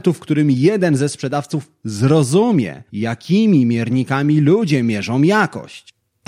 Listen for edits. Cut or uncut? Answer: cut